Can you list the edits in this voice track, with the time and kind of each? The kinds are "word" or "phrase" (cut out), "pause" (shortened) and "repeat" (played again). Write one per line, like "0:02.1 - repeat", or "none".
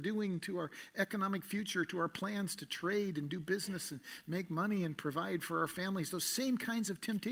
none